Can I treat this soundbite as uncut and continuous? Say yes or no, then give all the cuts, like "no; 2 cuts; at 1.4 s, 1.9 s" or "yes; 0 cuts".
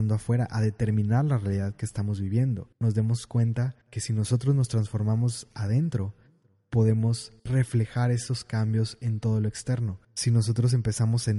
no; 4 cuts; at 2.7 s, 3.8 s, 7.4 s, 10.0 s